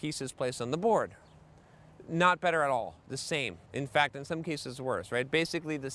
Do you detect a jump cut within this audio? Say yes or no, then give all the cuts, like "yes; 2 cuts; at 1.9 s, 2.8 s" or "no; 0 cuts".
yes; 1 cut; at 3.6 s